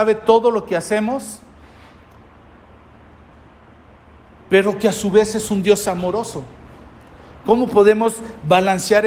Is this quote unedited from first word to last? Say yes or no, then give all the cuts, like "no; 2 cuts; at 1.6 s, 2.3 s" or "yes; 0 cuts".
yes; 0 cuts